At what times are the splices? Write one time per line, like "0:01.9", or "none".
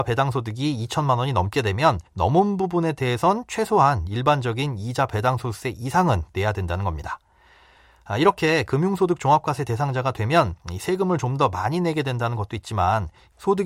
0:02.1